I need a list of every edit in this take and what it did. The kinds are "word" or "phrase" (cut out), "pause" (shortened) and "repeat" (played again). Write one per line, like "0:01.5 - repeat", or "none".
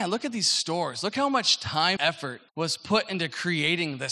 0:02.0 - word
0:02.5 - pause